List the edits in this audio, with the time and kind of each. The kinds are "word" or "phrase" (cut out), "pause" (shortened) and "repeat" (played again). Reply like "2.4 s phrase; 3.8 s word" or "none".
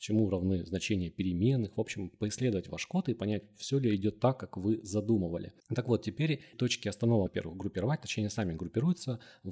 5.6 s pause; 6.5 s word; 7.3 s word